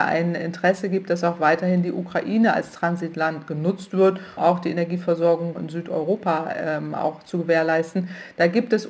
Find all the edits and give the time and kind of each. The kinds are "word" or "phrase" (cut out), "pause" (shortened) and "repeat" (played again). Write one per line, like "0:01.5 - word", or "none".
0:04.4 - word
0:05.6 - word